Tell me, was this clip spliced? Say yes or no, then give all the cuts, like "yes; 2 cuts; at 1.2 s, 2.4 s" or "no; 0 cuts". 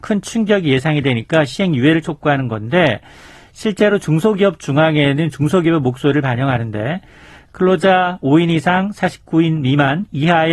no; 0 cuts